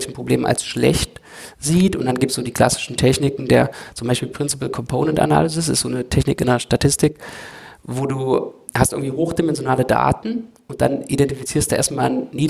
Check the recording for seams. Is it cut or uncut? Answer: cut